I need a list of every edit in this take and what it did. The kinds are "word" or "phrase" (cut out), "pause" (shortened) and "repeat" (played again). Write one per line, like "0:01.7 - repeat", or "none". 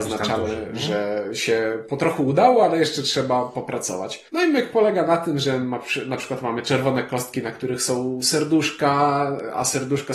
0:04.3 - pause